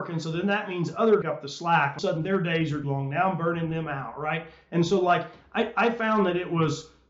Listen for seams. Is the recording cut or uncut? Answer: cut